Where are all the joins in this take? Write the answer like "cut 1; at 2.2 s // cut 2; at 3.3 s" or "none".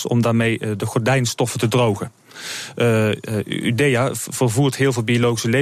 none